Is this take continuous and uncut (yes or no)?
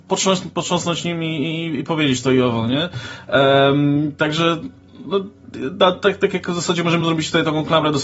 yes